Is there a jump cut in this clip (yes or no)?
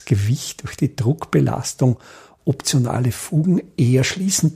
no